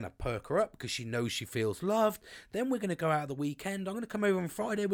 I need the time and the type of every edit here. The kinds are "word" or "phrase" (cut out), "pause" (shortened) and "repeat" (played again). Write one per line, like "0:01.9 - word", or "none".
none